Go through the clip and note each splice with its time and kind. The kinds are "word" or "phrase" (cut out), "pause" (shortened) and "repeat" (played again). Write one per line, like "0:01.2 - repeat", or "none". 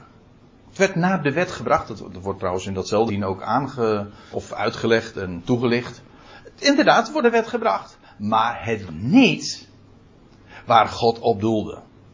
0:03.1 - word
0:04.3 - word
0:07.2 - word
0:08.9 - word